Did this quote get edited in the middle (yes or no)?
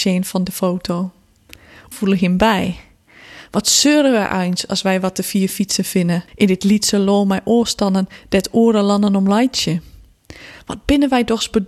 yes